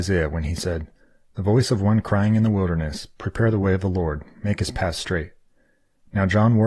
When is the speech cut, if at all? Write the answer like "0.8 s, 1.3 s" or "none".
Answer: none